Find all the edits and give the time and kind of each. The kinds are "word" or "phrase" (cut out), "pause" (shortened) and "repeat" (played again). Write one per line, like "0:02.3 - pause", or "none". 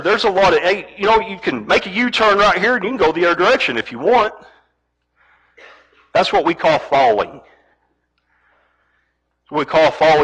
none